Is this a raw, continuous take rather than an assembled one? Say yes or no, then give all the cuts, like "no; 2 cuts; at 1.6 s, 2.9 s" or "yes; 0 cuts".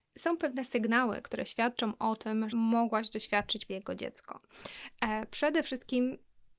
no; 2 cuts; at 2.5 s, 3.7 s